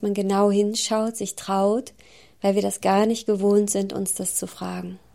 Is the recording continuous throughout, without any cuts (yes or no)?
yes